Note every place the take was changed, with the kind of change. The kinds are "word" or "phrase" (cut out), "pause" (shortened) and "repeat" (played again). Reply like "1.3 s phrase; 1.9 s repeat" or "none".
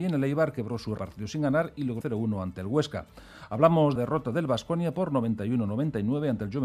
1.0 s phrase; 2.0 s phrase; 4.0 s phrase